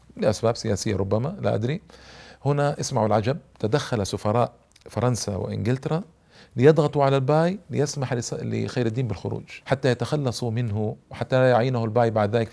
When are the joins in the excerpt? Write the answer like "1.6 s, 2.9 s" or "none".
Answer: 4.7 s, 9.6 s

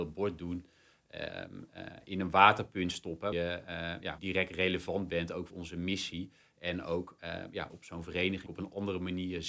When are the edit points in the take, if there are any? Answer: 3.3 s, 4.2 s, 5.5 s, 7.7 s, 8.5 s

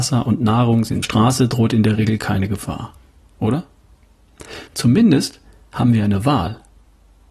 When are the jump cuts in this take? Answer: 1.0 s

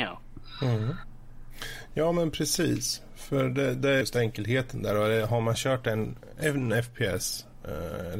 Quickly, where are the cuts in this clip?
4.0 s

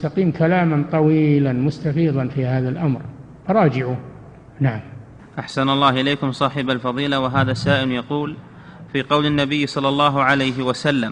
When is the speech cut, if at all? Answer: none

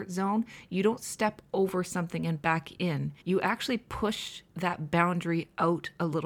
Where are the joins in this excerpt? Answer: 3.2 s

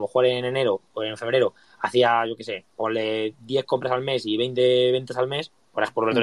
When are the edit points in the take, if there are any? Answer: none

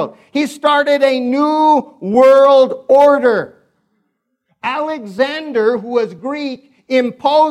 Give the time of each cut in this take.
none

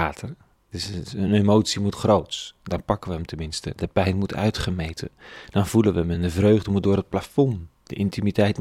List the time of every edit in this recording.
none

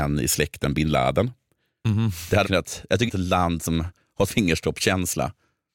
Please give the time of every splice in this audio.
2.4 s, 3.1 s, 4.3 s

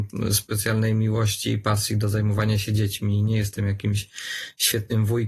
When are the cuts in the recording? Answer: none

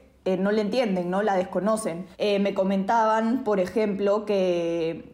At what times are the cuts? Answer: 2.1 s

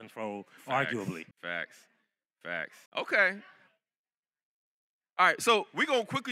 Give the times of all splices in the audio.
1.3 s, 2.9 s

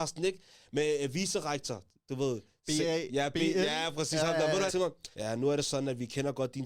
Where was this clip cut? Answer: 4.7 s, 5.1 s

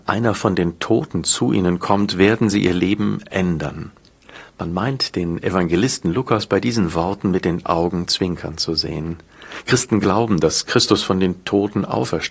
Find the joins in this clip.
none

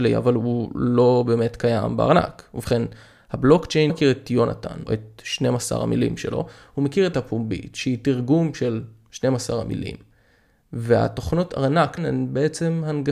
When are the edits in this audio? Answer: 3.9 s, 4.9 s, 7.1 s, 12.0 s

